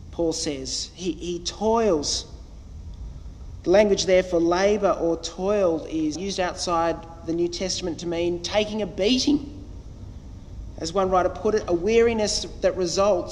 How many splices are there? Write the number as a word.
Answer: one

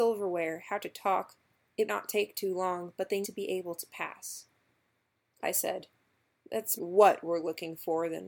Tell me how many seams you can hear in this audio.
four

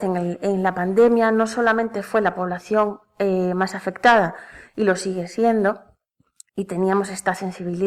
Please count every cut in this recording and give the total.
zero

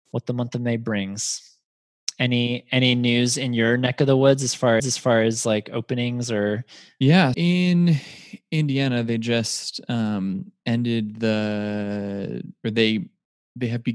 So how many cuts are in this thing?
two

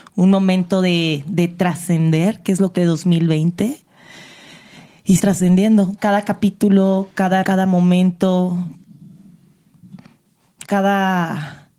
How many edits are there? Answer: five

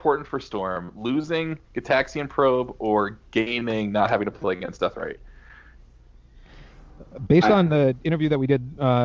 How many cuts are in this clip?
zero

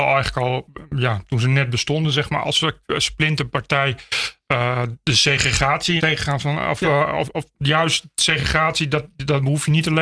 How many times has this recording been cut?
three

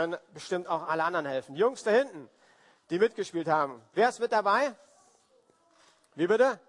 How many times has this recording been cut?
zero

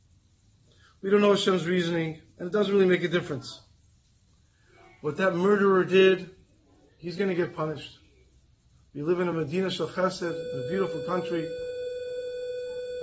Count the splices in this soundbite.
zero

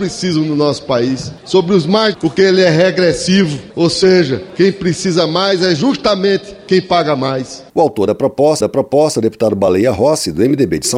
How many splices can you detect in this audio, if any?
two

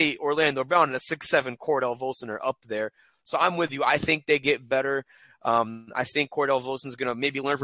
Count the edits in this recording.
zero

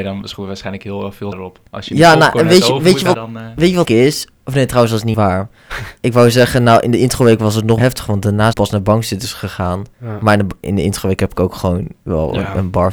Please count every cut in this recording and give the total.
eight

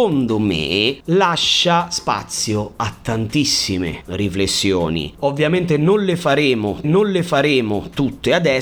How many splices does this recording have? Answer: one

